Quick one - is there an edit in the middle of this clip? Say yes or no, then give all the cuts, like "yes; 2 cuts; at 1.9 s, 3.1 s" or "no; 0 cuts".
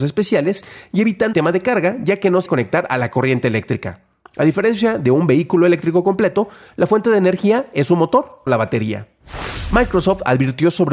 yes; 3 cuts; at 1.3 s, 2.5 s, 8.5 s